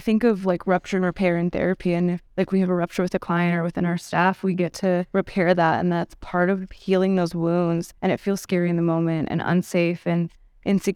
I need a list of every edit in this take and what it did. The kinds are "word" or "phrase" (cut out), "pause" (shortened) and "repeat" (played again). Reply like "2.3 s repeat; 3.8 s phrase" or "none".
2.3 s pause; 5.1 s pause; 8.0 s pause